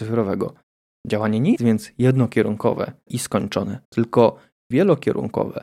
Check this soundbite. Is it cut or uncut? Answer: cut